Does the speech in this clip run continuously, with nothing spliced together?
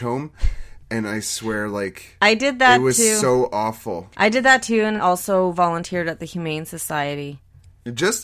no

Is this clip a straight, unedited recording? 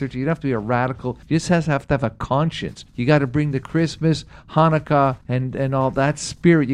no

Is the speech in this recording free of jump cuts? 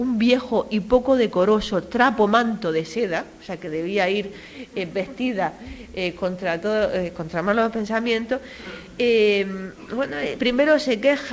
yes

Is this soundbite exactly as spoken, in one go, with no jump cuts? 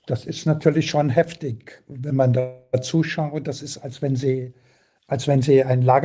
yes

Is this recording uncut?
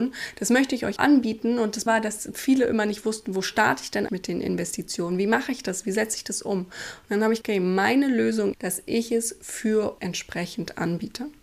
no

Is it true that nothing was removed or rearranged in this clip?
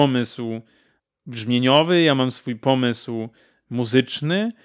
yes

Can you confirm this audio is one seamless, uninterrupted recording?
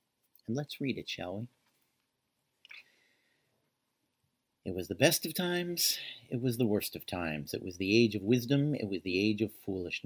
yes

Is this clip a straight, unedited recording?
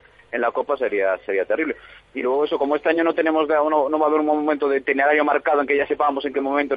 yes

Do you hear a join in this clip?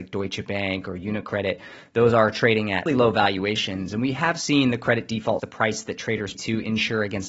yes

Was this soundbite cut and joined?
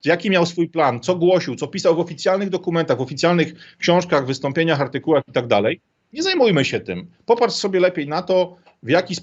no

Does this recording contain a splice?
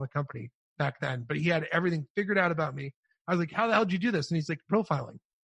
no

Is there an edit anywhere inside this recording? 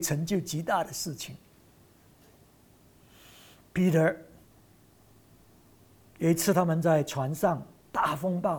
no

